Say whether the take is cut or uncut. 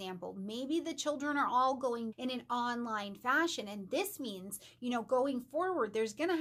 cut